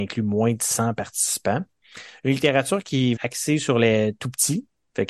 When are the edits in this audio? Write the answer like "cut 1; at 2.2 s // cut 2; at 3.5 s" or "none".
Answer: cut 1; at 3.2 s